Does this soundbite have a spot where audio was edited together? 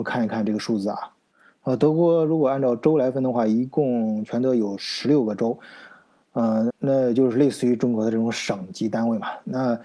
yes; 1 cut; at 6.7 s

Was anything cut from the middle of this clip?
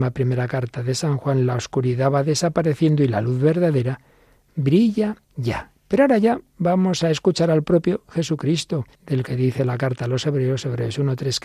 yes; 2 cuts; at 5.2 s, 8.9 s

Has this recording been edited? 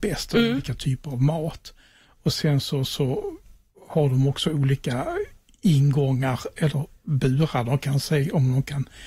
no; 0 cuts

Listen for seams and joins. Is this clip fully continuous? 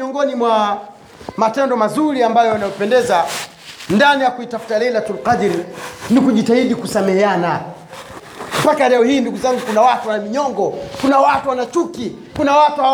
yes; 0 cuts

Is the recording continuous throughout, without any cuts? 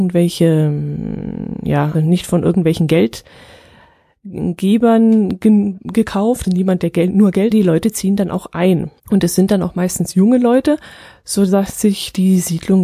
no; 4 cuts; at 1.9 s, 6.4 s, 7.5 s, 9.0 s

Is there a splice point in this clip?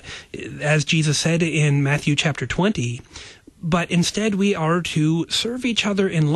no; 0 cuts

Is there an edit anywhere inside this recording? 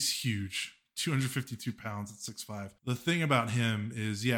yes; 1 cut; at 2.8 s

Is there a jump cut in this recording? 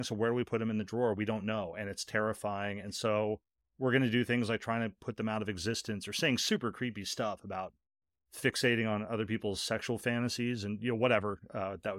no; 0 cuts

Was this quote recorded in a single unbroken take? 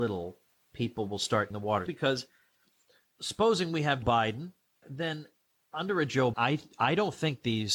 no; 6 cuts; at 1.5 s, 1.9 s, 3.0 s, 4.0 s, 4.8 s, 6.3 s

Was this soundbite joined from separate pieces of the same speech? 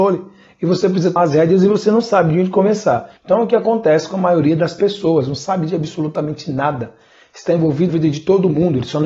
yes; 3 cuts; at 1.2 s, 3.2 s, 7.9 s

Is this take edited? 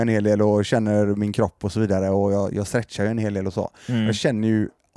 no; 0 cuts

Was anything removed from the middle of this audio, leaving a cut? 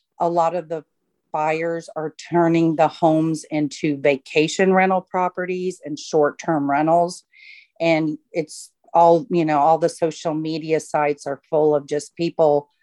no; 0 cuts

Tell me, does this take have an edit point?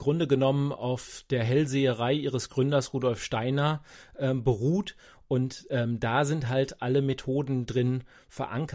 no; 0 cuts

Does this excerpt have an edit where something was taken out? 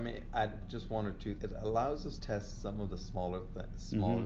yes; 2 cuts; at 1.4 s, 2.2 s

